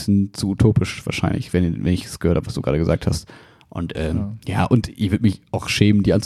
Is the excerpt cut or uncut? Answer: uncut